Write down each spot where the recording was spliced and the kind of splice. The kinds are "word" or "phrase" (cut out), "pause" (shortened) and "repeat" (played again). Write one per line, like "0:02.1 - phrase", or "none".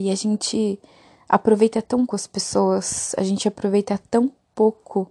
0:02.1 - word